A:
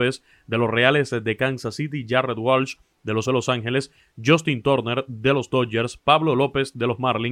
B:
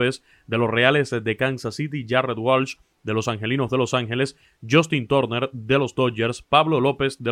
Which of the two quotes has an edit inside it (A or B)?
A